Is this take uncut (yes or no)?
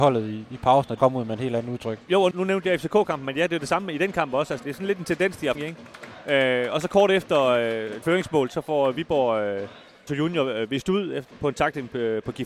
no